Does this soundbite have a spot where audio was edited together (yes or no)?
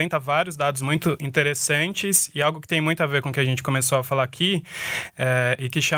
no